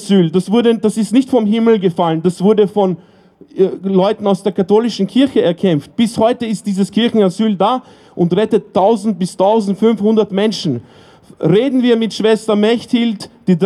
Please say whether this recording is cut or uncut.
uncut